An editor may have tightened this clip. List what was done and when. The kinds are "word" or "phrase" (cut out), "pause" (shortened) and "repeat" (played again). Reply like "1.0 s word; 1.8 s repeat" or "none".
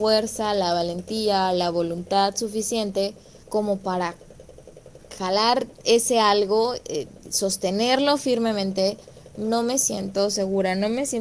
3.4 s pause